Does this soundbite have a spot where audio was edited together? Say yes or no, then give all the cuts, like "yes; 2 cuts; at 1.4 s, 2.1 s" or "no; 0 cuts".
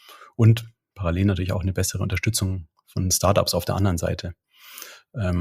no; 0 cuts